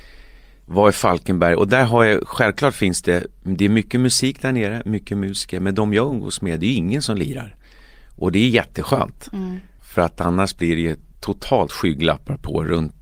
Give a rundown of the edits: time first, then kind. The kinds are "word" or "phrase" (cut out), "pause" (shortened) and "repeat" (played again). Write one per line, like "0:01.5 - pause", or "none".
none